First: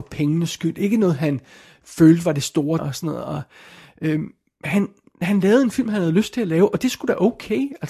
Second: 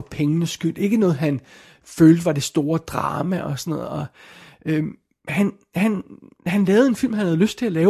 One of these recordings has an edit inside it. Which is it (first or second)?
first